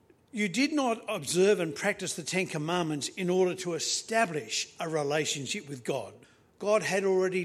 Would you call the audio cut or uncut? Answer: cut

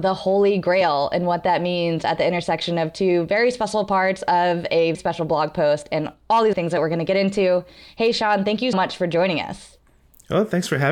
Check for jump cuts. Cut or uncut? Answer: cut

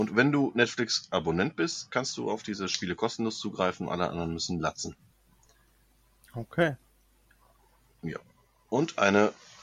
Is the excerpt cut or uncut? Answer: uncut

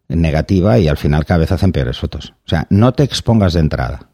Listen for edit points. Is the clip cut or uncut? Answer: uncut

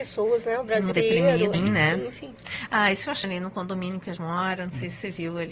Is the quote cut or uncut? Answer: cut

